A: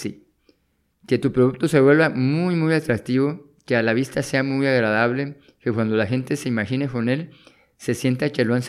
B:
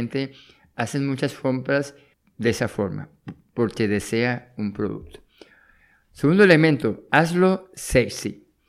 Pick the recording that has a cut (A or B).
B